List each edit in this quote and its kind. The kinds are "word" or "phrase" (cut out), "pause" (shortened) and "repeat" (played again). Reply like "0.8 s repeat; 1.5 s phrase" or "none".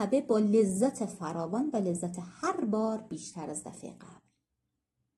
none